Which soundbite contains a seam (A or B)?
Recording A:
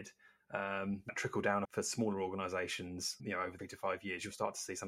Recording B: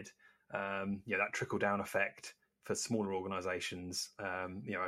A